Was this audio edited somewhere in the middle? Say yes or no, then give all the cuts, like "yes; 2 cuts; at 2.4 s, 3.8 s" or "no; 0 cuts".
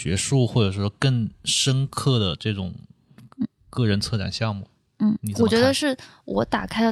no; 0 cuts